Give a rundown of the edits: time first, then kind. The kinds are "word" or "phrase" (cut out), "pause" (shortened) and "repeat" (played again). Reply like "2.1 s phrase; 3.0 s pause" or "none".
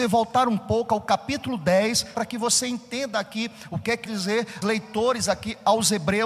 2.1 s word; 4.1 s phrase; 4.6 s word